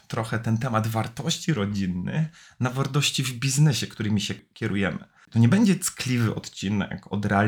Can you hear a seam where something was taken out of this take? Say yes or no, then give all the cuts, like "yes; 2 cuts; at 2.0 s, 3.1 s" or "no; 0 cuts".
no; 0 cuts